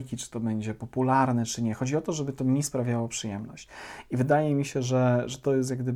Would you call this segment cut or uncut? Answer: uncut